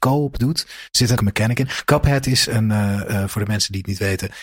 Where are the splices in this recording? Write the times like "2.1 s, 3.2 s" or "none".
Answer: 1.2 s